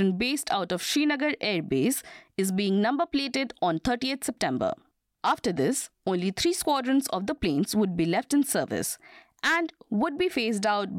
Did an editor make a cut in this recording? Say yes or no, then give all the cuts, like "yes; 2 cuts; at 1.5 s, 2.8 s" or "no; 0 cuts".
no; 0 cuts